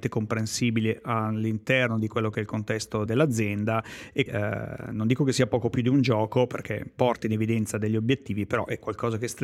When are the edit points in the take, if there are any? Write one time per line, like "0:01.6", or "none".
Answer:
0:03.1
0:04.3